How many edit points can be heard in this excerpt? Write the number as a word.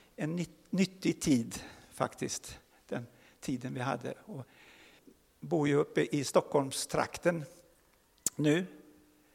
zero